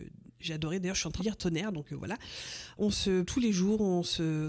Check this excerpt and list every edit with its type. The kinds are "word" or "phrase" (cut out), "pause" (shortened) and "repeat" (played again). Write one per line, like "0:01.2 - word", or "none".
0:01.2 - word
0:03.2 - word